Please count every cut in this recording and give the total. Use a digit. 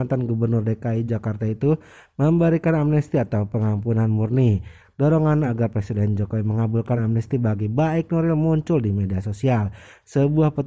0